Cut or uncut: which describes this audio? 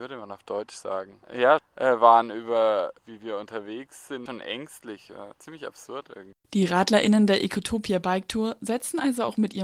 cut